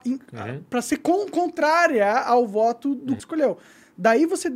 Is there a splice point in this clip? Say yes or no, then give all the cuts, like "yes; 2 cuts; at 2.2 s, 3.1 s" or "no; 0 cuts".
yes; 1 cut; at 3.2 s